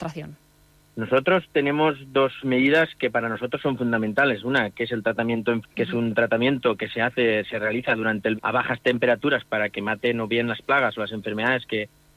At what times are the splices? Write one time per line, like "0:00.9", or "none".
0:05.6
0:08.4